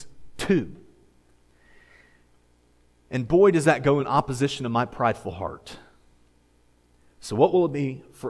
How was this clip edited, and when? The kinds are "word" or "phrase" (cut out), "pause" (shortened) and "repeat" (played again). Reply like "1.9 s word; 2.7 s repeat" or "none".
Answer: none